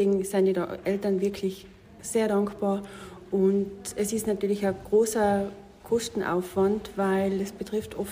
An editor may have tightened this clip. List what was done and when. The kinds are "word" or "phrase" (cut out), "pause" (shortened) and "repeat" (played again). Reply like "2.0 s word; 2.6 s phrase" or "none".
none